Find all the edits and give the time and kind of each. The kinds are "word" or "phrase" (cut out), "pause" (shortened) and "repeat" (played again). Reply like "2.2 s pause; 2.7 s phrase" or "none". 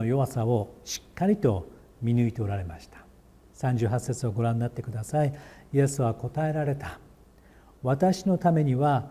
none